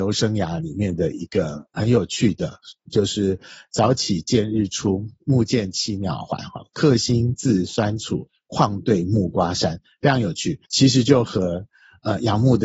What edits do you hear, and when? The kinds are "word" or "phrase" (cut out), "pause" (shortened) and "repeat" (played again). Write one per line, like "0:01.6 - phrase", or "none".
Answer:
0:10.7 - pause